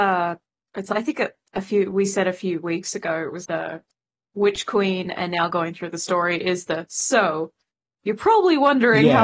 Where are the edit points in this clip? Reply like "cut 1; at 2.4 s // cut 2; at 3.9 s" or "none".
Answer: cut 1; at 3.5 s